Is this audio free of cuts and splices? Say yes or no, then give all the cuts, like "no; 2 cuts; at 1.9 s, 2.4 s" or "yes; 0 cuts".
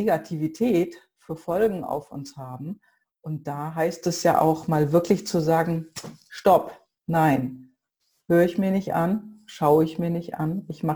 yes; 0 cuts